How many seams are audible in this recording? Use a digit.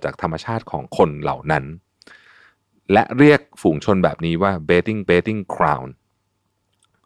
1